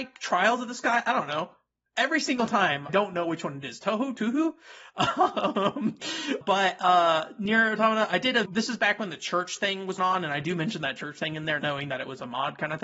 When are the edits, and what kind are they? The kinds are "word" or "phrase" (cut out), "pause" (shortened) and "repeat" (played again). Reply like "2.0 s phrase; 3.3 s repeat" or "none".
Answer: 2.9 s word; 4.1 s word; 6.4 s word; 8.4 s word; 10.0 s word; 11.6 s word